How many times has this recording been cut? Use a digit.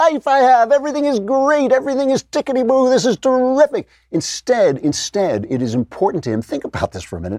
0